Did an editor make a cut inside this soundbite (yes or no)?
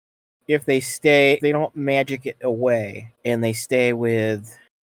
yes